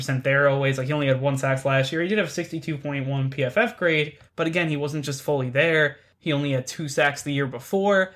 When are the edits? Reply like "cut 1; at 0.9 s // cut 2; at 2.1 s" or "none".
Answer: cut 1; at 4.3 s